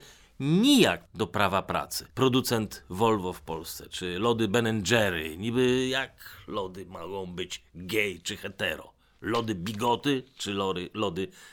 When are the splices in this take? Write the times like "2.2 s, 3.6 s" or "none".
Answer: 1.0 s, 2.1 s